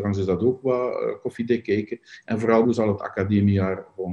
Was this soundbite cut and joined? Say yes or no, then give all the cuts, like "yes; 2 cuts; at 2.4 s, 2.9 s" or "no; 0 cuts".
yes; 1 cut; at 2.6 s